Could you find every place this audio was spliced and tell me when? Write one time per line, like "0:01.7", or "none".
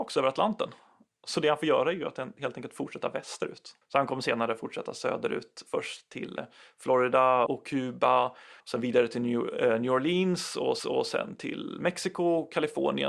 0:03.8
0:07.5
0:08.6
0:10.8